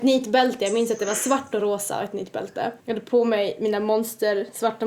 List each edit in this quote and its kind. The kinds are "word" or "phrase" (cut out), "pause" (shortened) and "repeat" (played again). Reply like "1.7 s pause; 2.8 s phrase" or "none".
2.8 s pause